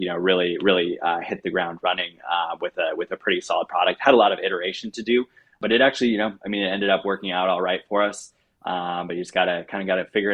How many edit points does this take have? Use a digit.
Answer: 0